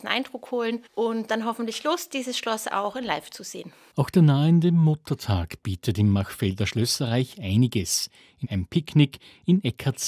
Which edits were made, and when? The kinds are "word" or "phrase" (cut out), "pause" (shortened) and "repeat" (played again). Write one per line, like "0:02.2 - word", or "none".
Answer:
0:01.3 - word
0:08.4 - word

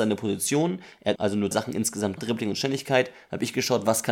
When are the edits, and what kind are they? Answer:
0:01.2 - phrase
0:01.5 - word
0:02.2 - word

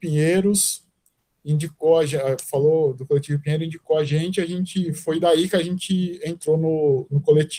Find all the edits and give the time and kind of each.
none

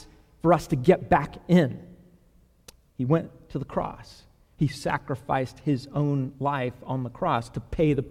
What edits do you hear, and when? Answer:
none

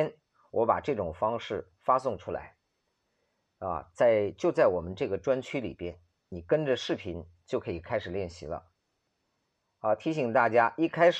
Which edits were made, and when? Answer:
none

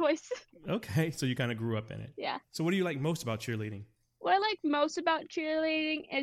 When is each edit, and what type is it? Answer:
none

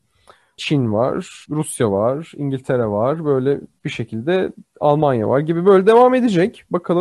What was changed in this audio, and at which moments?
0:01.4 - pause

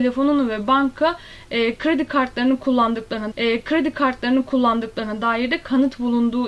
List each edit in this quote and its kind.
0:03.3 - repeat

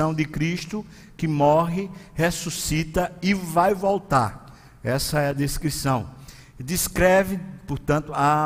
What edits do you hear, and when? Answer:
none

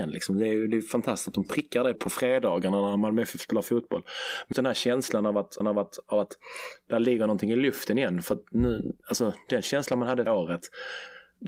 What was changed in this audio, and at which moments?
0:02.0 - word
0:04.5 - word
0:05.6 - repeat
0:10.3 - word

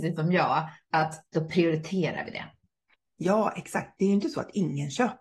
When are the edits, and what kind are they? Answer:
none

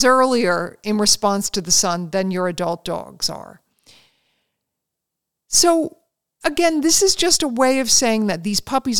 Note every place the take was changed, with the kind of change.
none

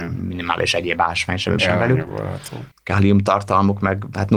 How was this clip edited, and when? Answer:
0:01.6 - phrase
0:02.7 - pause

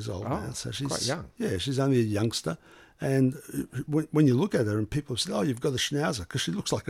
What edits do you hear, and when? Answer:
none

